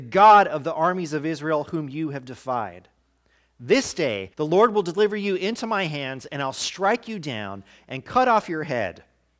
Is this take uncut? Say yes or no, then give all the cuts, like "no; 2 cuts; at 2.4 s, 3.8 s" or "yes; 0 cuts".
no; 1 cut; at 4.3 s